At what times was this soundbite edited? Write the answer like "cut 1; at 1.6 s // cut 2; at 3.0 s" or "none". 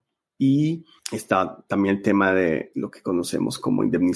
none